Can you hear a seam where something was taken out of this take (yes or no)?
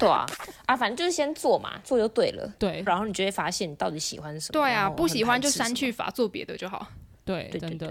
yes